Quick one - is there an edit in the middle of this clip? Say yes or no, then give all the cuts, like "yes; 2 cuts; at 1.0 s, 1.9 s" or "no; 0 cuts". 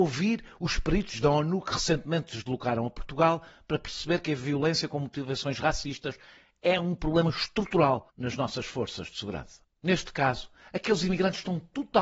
no; 0 cuts